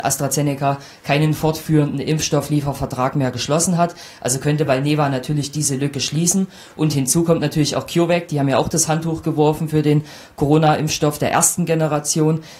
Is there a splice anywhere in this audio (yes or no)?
no